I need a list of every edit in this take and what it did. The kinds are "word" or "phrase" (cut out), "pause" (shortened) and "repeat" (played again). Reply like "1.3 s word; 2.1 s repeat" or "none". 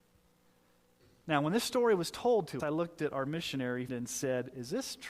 2.6 s word; 3.9 s word